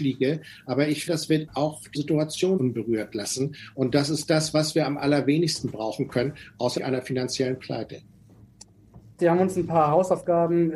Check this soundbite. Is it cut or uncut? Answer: cut